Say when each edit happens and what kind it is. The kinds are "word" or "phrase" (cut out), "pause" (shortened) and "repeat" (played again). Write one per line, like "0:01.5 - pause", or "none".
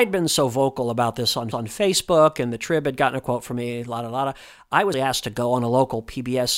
0:01.5 - repeat
0:04.9 - word